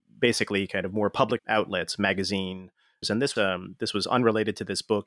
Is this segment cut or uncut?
cut